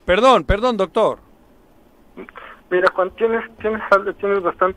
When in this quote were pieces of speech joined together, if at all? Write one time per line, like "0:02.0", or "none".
none